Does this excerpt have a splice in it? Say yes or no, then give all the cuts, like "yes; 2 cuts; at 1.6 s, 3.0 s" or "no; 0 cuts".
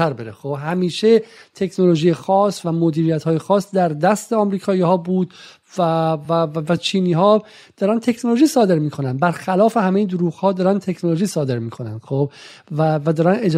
no; 0 cuts